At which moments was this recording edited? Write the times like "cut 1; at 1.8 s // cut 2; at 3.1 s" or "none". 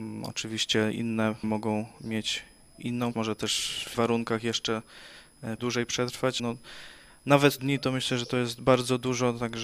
cut 1; at 1.4 s // cut 2; at 3.1 s // cut 3; at 3.9 s // cut 4; at 5.6 s // cut 5; at 6.4 s // cut 6; at 7.6 s